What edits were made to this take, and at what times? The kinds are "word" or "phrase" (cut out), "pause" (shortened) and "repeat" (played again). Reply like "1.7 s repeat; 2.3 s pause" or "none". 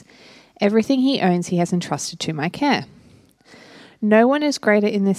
none